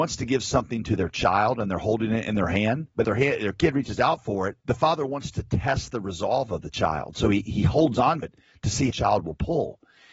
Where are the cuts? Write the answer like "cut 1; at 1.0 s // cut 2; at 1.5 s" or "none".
cut 1; at 3.0 s // cut 2; at 4.6 s // cut 3; at 7.5 s // cut 4; at 8.2 s // cut 5; at 8.9 s

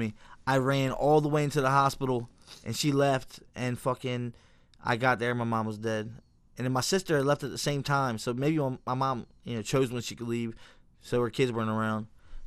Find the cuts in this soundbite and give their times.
none

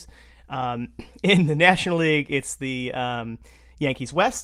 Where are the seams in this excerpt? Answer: none

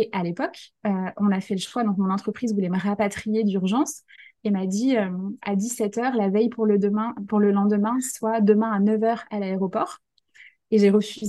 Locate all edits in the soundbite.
none

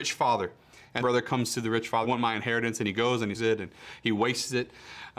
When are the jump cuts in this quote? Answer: cut 1; at 1.0 s // cut 2; at 2.0 s // cut 3; at 3.3 s

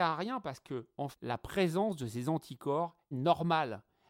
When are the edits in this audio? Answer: cut 1; at 1.1 s // cut 2; at 3.1 s

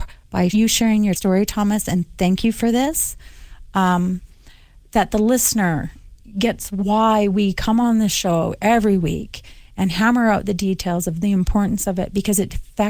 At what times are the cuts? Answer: none

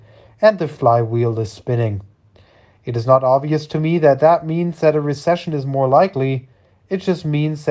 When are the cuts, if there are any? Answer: none

